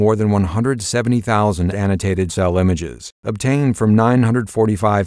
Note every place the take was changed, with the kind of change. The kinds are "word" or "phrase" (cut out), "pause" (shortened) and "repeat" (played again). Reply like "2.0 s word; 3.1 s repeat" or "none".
1.7 s word; 2.3 s word